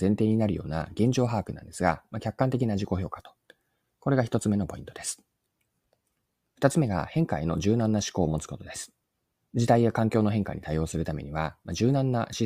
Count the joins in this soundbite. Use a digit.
1